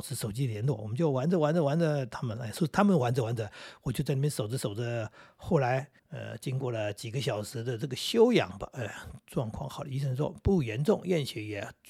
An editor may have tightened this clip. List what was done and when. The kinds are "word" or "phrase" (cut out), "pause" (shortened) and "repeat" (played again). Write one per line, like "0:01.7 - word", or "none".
0:06.0 - pause